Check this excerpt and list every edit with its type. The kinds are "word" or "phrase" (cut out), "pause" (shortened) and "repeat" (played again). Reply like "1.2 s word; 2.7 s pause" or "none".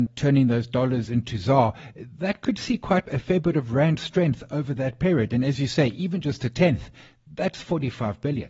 none